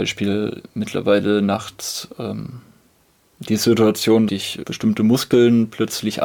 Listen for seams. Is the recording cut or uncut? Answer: cut